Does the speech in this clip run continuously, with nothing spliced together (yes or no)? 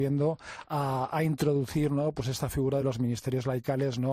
yes